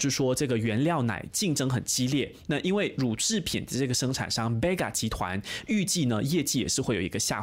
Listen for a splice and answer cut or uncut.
uncut